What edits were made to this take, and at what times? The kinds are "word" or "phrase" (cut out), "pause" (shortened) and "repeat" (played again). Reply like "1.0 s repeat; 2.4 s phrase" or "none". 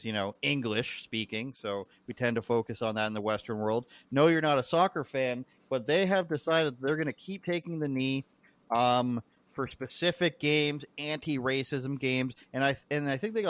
none